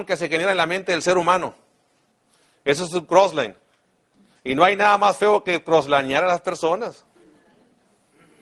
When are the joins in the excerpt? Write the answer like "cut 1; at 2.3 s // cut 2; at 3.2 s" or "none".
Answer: none